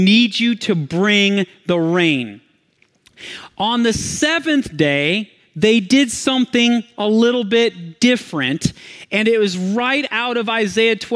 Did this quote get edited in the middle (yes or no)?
no